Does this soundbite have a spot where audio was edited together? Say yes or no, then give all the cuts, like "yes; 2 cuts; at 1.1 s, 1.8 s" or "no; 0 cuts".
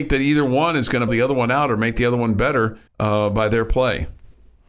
yes; 2 cuts; at 1.1 s, 2.9 s